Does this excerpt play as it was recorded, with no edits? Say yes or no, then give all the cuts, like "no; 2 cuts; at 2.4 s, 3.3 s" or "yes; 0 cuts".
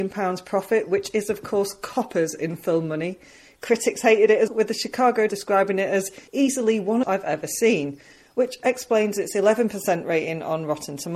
no; 4 cuts; at 4.5 s, 5.3 s, 6.3 s, 7.0 s